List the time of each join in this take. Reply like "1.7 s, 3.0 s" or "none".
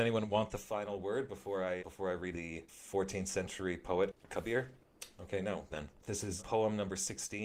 1.8 s, 2.3 s, 5.7 s, 6.4 s